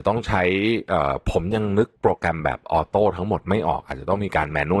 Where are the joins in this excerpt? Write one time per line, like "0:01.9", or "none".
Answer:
0:01.9